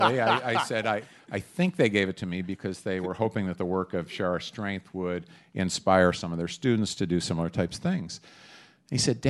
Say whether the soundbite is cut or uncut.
uncut